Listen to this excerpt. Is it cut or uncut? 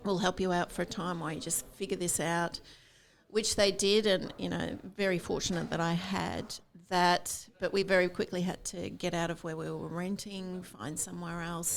uncut